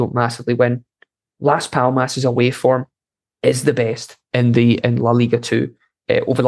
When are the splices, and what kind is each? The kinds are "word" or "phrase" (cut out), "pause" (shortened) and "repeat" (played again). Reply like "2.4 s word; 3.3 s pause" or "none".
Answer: 3.1 s pause; 4.2 s pause; 4.8 s word